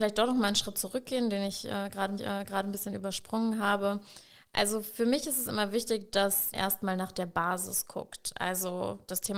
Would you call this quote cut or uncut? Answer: cut